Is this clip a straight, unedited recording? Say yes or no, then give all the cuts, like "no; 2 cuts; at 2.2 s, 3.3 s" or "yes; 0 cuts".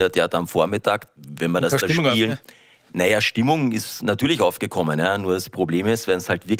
yes; 0 cuts